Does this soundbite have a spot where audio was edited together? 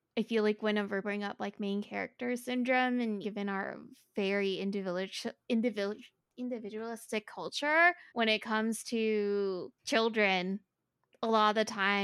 yes; 4 cuts; at 1.0 s, 3.2 s, 8.1 s, 9.8 s

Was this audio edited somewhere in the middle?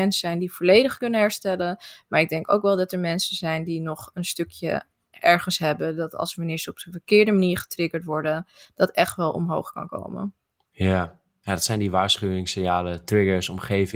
no; 0 cuts

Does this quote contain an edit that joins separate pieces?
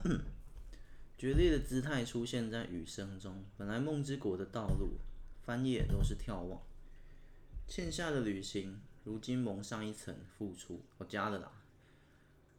yes; 1 cut; at 10.9 s

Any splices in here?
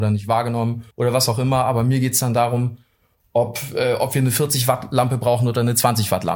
yes; 1 cut; at 0.9 s

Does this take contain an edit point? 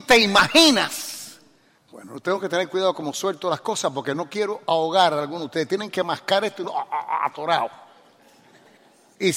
no; 0 cuts

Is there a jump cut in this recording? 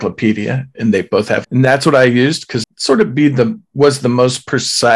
yes; 2 cuts; at 1.4 s, 2.6 s

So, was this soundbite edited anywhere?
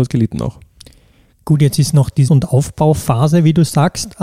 yes; 1 cut; at 2.3 s

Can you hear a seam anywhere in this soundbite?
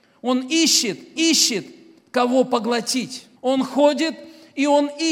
yes; 2 cuts; at 1.2 s, 3.4 s

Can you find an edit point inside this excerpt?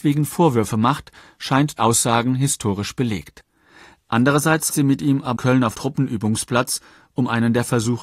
yes; 4 cuts; at 1.8 s, 4.7 s, 5.4 s, 5.7 s

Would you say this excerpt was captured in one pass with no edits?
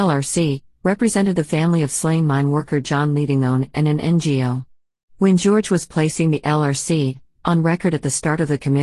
yes; 0 cuts

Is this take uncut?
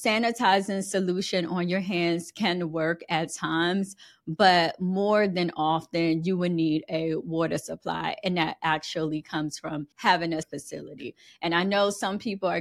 no; 2 cuts; at 9.9 s, 10.4 s

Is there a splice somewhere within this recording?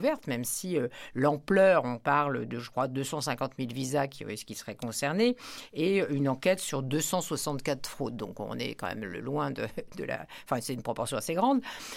yes; 1 cut; at 2.5 s

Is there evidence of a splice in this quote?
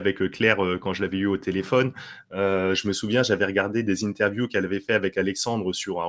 no; 0 cuts

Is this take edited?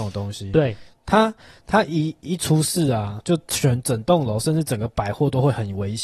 no; 0 cuts

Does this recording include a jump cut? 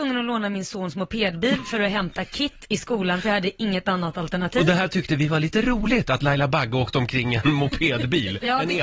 no; 0 cuts

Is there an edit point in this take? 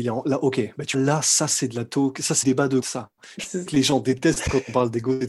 yes; 4 cuts; at 0.9 s, 2.4 s, 2.8 s, 3.7 s

